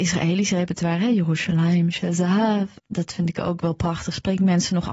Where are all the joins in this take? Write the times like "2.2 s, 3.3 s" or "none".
2.8 s